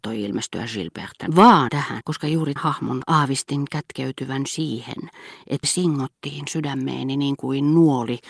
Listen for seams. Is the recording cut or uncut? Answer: cut